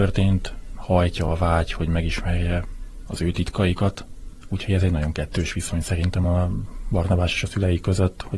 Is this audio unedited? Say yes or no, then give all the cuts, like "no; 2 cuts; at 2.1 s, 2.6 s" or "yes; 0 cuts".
yes; 0 cuts